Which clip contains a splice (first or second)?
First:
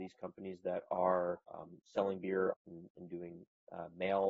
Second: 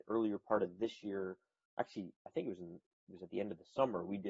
first